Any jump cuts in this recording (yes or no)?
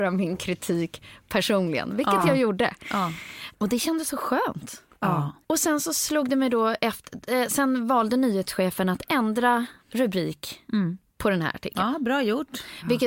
yes